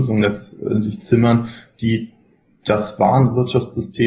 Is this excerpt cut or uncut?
uncut